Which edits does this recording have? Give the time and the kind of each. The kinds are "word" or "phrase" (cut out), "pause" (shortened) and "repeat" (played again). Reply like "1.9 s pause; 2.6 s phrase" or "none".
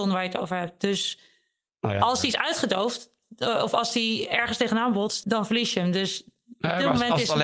5.2 s word